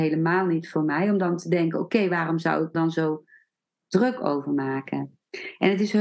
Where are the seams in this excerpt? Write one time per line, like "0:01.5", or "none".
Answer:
0:02.7